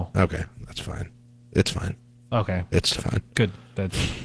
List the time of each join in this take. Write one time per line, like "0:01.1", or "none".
0:03.0